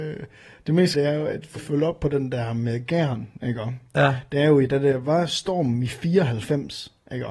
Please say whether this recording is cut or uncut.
cut